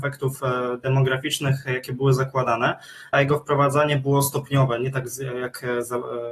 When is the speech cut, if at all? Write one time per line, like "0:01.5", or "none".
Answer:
0:03.1